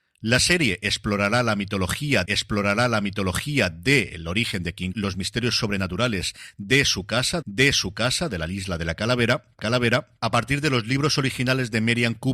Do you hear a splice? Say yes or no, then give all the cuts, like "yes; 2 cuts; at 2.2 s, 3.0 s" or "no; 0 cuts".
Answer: yes; 4 cuts; at 2.3 s, 4.9 s, 7.4 s, 9.6 s